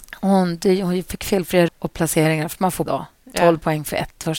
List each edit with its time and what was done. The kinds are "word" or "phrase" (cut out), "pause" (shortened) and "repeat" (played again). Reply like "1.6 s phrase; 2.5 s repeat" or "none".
1.7 s word; 2.9 s word